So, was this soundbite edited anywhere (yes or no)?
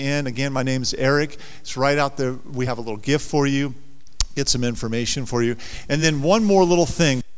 no